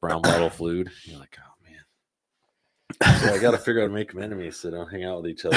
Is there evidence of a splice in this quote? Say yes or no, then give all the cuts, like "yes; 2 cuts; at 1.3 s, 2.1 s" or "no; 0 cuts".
yes; 1 cut; at 3.9 s